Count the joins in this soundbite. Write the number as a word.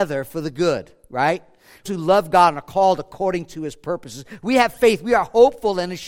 one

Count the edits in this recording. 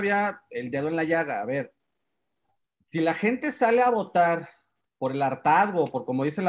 zero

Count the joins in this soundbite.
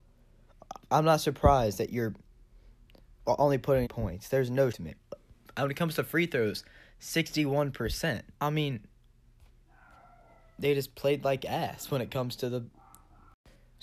three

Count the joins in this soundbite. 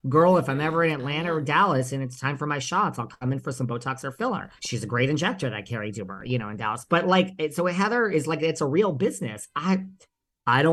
two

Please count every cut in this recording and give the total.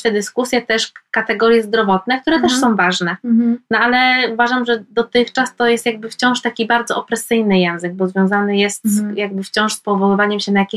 zero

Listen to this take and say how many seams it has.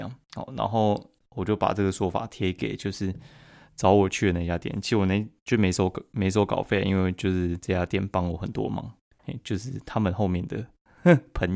zero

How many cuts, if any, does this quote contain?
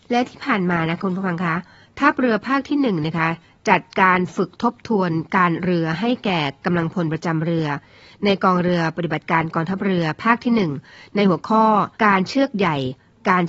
one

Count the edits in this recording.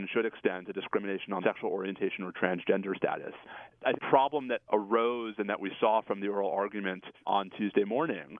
two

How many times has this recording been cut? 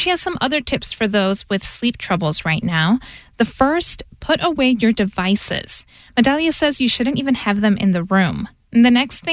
zero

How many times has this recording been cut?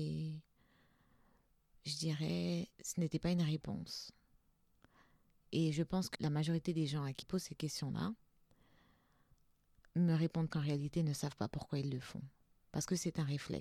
four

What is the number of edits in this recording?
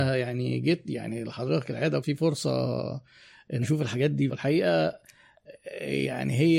three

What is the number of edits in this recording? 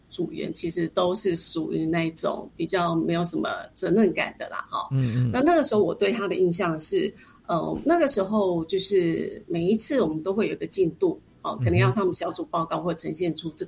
zero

